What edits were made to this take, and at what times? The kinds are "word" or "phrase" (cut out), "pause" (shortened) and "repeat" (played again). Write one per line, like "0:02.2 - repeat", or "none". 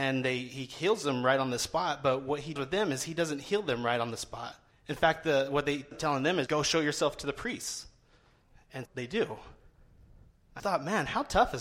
0:02.6 - word
0:04.7 - pause
0:05.9 - phrase
0:06.5 - word
0:08.9 - word
0:10.6 - word

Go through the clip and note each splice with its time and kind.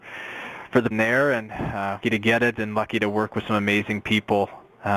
0:00.9 - word
0:02.0 - word

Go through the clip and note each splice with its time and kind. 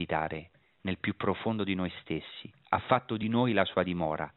none

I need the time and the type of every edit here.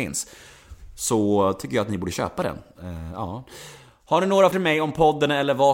0:04.5 - word

